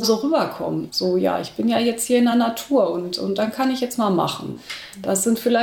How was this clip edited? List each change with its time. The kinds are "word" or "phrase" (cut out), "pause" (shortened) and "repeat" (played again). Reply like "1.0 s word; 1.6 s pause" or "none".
none